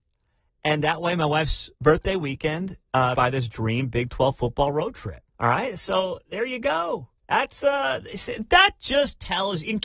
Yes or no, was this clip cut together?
yes